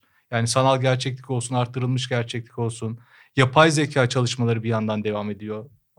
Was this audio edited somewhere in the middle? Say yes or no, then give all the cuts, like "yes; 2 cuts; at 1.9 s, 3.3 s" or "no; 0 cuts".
no; 0 cuts